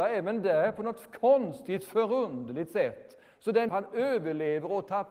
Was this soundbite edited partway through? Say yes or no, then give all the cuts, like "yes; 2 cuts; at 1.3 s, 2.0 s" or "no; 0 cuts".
yes; 1 cut; at 3.7 s